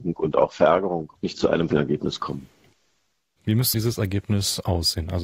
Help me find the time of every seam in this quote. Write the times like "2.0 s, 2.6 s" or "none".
1.2 s, 1.7 s, 3.7 s